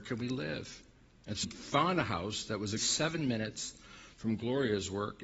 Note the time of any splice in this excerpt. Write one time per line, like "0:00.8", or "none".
0:01.4
0:02.8